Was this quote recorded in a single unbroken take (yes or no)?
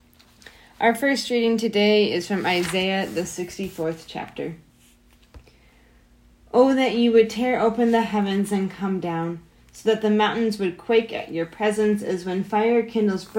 yes